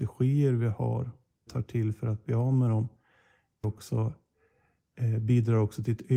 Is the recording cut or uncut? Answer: cut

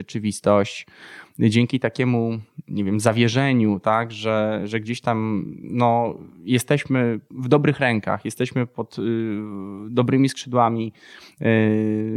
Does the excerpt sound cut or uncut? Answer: cut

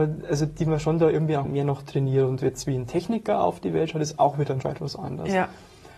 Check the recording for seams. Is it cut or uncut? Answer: cut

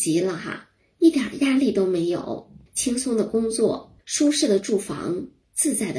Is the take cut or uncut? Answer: cut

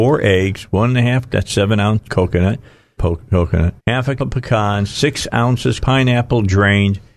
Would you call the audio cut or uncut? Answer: cut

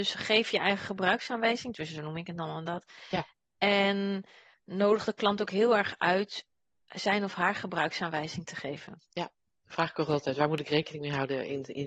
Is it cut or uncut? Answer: uncut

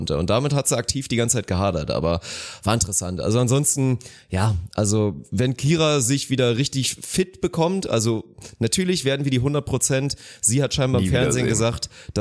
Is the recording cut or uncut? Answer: uncut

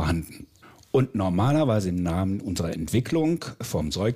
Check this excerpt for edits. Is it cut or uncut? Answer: uncut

